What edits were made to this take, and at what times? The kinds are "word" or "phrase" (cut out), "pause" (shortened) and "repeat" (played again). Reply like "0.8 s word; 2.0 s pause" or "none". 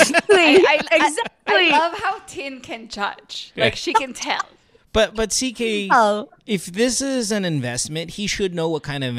none